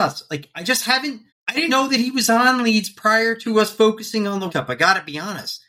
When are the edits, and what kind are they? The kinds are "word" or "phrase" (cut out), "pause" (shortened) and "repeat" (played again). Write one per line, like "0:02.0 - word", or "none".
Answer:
0:01.3 - pause
0:01.7 - word
0:04.5 - word

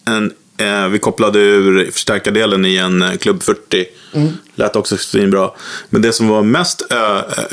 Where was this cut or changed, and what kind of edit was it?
none

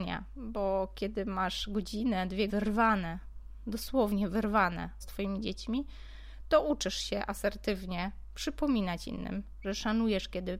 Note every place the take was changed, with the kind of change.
0:02.5 - word
0:05.0 - phrase

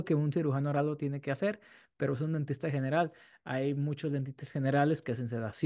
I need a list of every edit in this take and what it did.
none

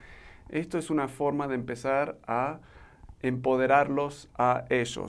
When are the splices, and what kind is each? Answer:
none

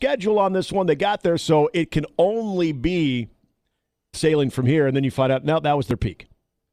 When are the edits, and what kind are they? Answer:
0:04.1 - word

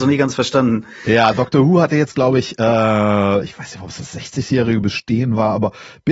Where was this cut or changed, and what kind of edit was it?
none

